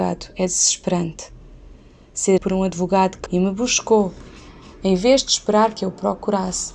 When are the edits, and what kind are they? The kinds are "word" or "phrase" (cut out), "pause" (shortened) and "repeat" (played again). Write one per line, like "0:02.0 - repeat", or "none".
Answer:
0:02.4 - word
0:03.3 - word

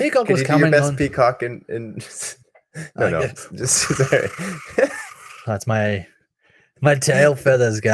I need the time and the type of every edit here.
none

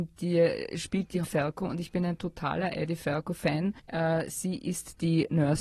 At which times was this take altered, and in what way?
0:01.2 - phrase
0:03.8 - pause

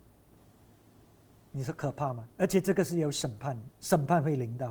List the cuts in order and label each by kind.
0:02.3 - pause
0:03.7 - pause

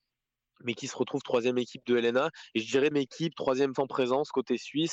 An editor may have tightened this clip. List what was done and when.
0:02.9 - word
0:03.8 - word

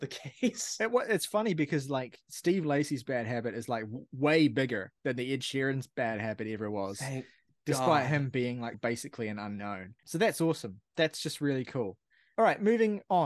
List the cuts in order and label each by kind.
0:08.7 - word
0:10.0 - pause

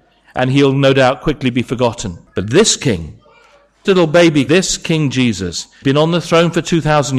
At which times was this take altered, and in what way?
0:02.3 - pause
0:03.8 - word
0:04.5 - word
0:05.8 - word

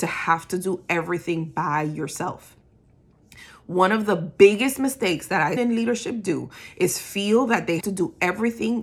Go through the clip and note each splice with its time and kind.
0:05.6 - phrase
0:07.8 - word

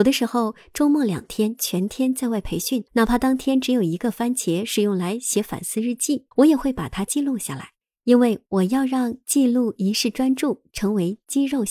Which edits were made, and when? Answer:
0:02.9 - pause
0:06.3 - pause
0:07.8 - pause

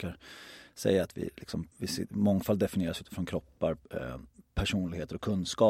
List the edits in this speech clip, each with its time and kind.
0:01.7 - pause
0:03.8 - pause

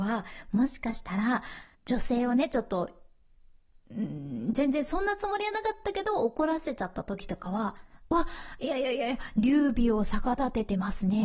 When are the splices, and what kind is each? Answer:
0:01.7 - pause

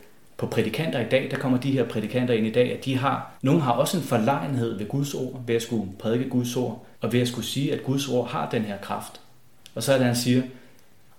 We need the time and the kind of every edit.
0:03.4 - pause
0:06.9 - pause

